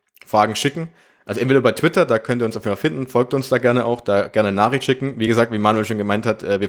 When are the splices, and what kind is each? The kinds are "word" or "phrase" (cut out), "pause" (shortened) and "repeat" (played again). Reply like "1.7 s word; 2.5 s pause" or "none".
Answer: none